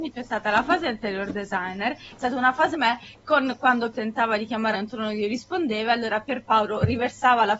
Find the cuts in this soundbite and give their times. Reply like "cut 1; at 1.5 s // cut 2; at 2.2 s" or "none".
cut 1; at 2.7 s // cut 2; at 3.9 s // cut 3; at 4.7 s